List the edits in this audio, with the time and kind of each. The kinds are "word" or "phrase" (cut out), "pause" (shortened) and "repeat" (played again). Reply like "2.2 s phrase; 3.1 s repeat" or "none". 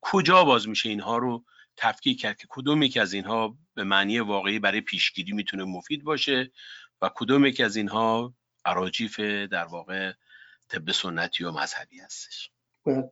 none